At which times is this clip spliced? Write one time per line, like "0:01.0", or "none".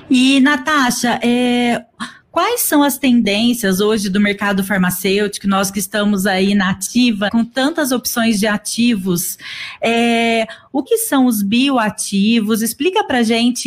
0:07.3
0:10.9

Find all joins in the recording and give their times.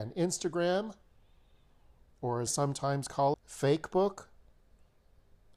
0:02.5
0:03.3

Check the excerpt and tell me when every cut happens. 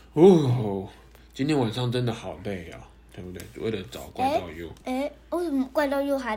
none

